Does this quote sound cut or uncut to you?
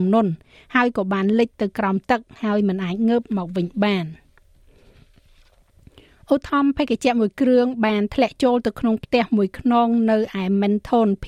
uncut